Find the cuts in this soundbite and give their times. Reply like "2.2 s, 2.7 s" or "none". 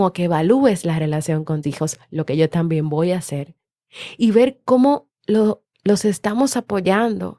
1.6 s, 5.2 s